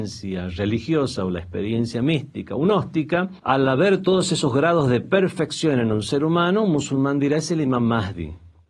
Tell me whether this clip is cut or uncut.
uncut